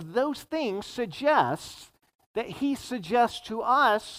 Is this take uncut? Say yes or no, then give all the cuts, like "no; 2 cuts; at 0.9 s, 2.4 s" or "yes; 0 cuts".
yes; 0 cuts